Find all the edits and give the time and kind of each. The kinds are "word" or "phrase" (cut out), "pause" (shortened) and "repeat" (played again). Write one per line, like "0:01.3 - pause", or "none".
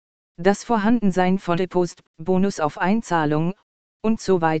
0:01.5 - word
0:02.0 - word